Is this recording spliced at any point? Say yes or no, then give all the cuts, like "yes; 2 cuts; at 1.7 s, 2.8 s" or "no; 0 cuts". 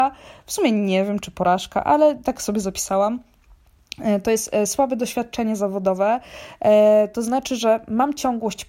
no; 0 cuts